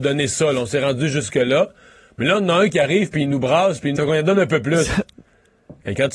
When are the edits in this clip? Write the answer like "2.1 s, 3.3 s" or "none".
4.0 s